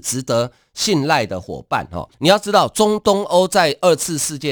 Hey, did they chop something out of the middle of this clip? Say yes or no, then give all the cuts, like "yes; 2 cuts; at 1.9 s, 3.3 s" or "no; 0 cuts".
yes; 1 cut; at 2.1 s